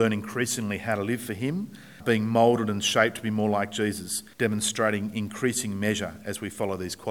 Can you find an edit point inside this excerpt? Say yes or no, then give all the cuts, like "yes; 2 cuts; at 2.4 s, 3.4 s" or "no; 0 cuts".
yes; 2 cuts; at 2.0 s, 4.3 s